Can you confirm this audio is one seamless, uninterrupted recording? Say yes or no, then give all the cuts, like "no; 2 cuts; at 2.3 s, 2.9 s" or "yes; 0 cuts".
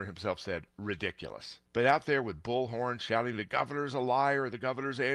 no; 1 cut; at 1.7 s